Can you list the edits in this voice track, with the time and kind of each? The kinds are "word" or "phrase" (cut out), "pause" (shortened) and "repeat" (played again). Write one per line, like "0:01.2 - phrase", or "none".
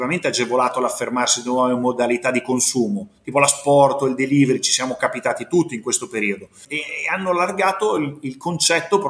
none